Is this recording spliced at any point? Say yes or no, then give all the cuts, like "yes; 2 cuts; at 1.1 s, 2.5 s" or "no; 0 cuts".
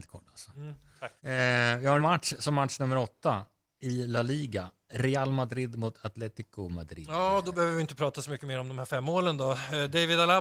yes; 3 cuts; at 1.2 s, 2.0 s, 3.6 s